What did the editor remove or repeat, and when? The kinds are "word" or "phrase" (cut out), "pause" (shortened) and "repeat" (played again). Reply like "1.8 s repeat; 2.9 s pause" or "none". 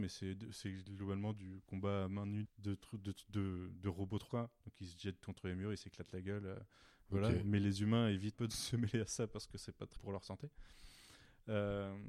2.4 s word; 4.3 s word; 8.3 s word; 10.0 s word